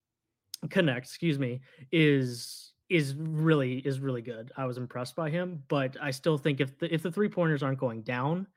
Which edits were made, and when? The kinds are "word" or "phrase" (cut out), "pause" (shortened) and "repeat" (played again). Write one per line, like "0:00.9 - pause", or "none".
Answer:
0:02.8 - pause